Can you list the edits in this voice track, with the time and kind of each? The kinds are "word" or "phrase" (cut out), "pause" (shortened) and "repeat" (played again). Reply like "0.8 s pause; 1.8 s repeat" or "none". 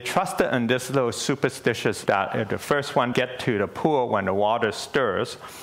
2.1 s word; 3.1 s word

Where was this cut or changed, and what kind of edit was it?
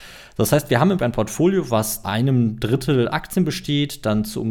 1.0 s word; 2.0 s word; 3.1 s word

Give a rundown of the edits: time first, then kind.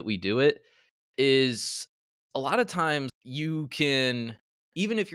3.1 s word

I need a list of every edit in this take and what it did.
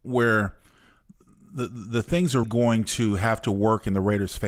2.4 s word

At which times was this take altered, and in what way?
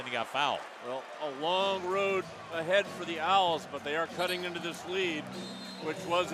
1.2 s word

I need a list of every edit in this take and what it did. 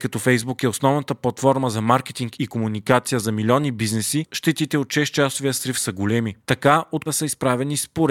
7.1 s word

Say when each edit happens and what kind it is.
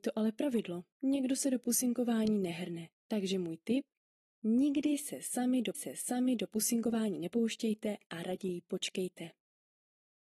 0.9 s pause; 3.0 s pause; 5.7 s repeat

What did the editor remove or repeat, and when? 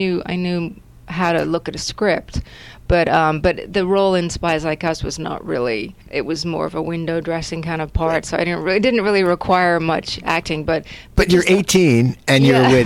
6.0 s pause

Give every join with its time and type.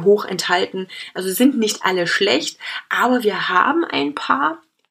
none

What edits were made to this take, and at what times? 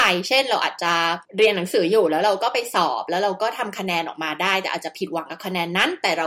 1.2 s pause

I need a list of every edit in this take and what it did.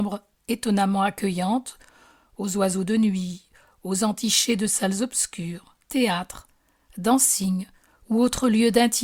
5.8 s word

